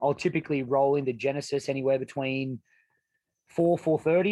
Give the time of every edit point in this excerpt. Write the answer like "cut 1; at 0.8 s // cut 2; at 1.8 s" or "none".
none